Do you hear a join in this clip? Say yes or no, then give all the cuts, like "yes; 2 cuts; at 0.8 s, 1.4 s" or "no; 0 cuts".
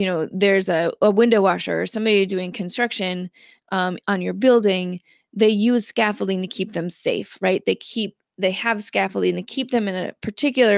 no; 0 cuts